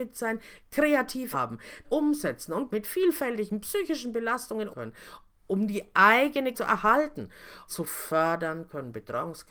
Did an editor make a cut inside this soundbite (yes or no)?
yes